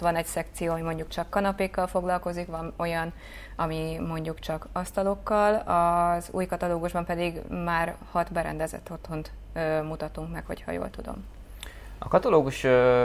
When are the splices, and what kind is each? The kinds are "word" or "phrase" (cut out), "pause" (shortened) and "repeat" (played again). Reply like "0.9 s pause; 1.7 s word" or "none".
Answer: none